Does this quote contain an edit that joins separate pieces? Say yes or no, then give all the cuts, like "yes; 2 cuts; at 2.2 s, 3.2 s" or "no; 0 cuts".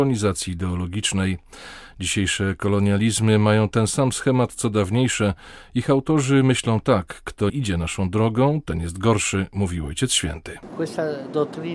yes; 1 cut; at 7.5 s